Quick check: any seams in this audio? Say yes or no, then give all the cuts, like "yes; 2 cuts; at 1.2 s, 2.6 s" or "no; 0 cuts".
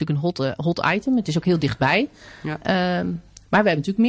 no; 0 cuts